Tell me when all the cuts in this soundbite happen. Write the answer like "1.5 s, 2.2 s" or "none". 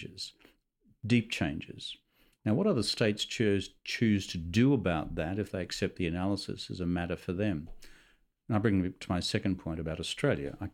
none